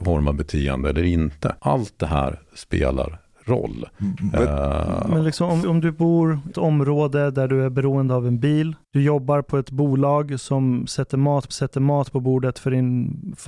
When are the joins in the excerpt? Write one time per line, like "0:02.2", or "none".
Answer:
0:01.6
0:05.6
0:06.5
0:08.8
0:11.5